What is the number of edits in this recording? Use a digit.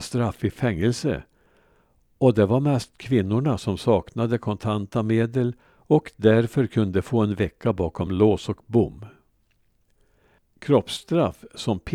0